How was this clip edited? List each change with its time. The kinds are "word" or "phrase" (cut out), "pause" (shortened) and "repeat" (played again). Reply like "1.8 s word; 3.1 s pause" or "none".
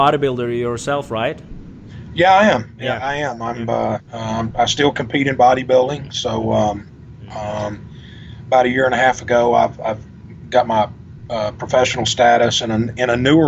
4.1 s pause